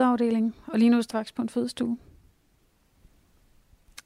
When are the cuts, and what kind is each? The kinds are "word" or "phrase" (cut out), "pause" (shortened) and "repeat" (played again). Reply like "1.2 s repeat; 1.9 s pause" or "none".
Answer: 1.1 s word